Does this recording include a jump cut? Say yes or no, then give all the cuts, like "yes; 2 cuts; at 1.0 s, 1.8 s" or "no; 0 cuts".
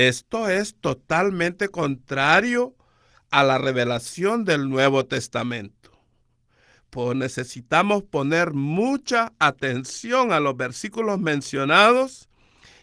yes; 1 cut; at 7.1 s